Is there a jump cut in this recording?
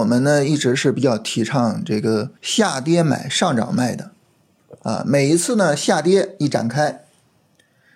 yes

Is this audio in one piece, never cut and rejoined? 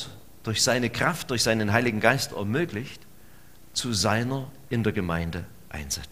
no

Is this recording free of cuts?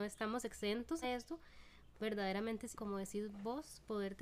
no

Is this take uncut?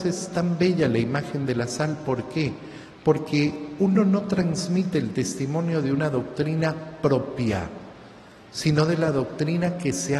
yes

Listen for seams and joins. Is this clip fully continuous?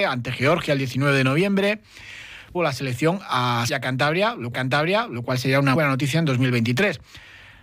no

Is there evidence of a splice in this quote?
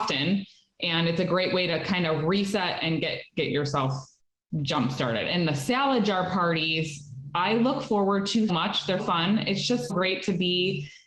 yes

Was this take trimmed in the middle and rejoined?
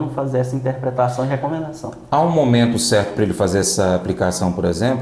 no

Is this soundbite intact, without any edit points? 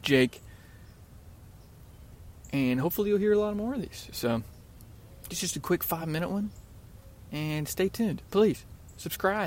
yes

